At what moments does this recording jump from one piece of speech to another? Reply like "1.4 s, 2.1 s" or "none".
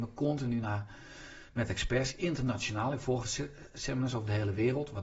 3.2 s